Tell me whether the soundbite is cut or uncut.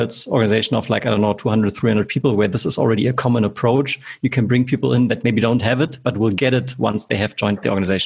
uncut